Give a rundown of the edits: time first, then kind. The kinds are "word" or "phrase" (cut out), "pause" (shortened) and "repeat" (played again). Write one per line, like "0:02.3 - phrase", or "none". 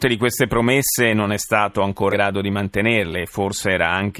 0:02.1 - word